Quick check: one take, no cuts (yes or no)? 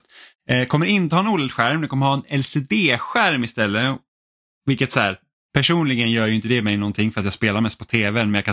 yes